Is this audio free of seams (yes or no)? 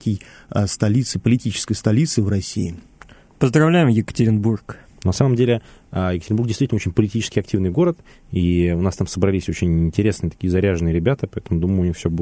yes